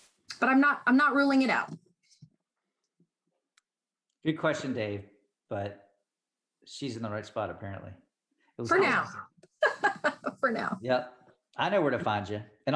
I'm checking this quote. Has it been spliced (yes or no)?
no